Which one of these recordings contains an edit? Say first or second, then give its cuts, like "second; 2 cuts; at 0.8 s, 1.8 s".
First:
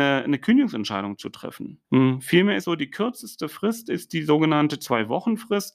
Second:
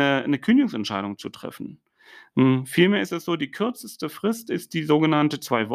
first; 2 cuts; at 1.8 s, 2.6 s